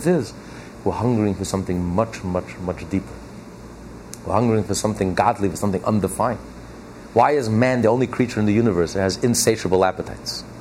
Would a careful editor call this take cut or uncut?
uncut